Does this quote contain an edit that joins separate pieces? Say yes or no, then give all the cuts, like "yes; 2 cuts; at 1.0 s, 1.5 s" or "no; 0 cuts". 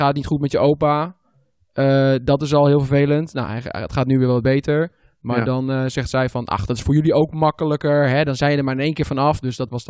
no; 0 cuts